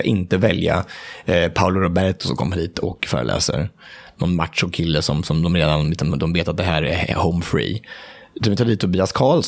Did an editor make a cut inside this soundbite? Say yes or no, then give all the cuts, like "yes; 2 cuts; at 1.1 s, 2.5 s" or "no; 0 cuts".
no; 0 cuts